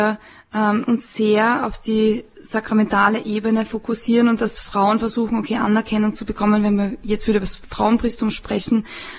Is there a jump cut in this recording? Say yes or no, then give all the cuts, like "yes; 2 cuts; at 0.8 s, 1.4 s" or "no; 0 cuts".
no; 0 cuts